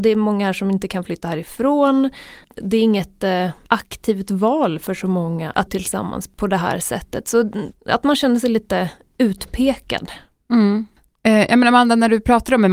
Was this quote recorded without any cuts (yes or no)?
no